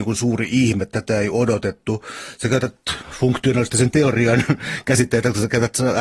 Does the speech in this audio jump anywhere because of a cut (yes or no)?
no